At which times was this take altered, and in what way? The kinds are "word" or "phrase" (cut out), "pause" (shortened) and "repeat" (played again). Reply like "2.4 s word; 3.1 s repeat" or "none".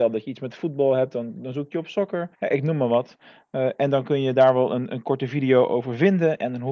2.3 s pause

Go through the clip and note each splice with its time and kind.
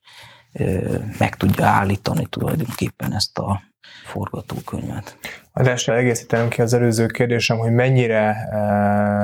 4.0 s word; 5.9 s word

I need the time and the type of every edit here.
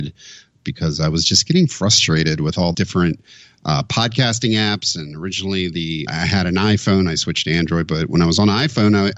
2.7 s word; 6.1 s word

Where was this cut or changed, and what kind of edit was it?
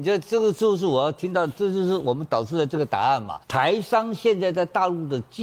3.4 s pause

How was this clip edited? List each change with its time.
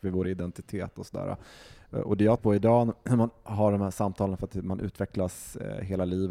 2.4 s word

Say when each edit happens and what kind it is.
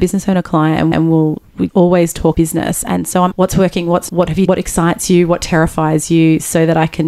0.9 s repeat; 1.7 s word; 2.3 s word; 3.3 s phrase; 4.1 s word; 4.5 s phrase

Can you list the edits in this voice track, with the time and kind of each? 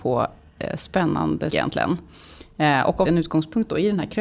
1.5 s word; 3.1 s phrase

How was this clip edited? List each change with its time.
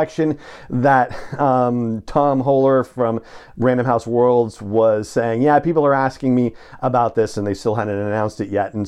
none

